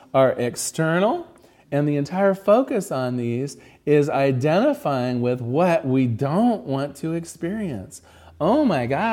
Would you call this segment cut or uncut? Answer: uncut